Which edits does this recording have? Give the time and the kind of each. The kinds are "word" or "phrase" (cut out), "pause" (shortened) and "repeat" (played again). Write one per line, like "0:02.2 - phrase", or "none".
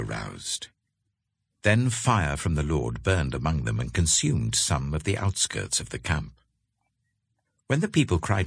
none